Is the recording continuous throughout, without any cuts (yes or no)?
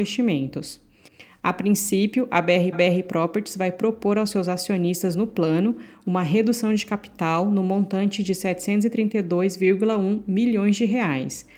no